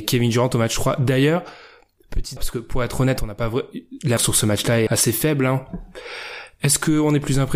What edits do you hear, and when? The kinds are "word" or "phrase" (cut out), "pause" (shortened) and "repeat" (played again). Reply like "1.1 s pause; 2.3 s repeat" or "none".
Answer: 2.4 s word; 4.2 s word; 4.9 s word

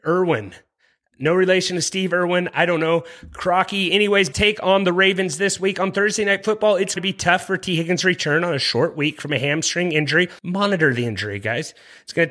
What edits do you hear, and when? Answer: 4.3 s word; 7.0 s word; 10.4 s pause

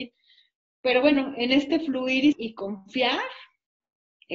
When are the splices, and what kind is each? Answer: 2.3 s word

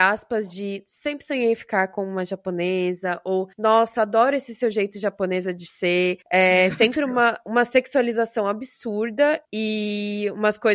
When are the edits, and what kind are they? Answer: 3.5 s pause; 6.2 s pause; 9.4 s pause

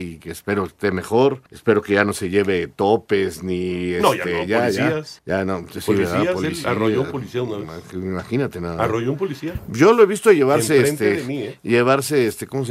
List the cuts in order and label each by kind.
1.5 s pause; 5.2 s pause

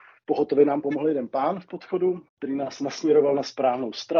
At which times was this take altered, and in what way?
2.3 s pause

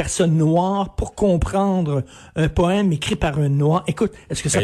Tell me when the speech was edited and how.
none

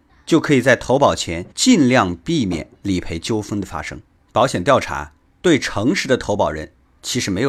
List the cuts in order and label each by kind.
1.5 s pause; 2.7 s pause

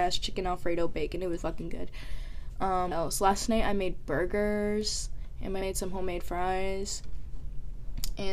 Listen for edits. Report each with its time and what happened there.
1.4 s word; 2.9 s word; 5.6 s word

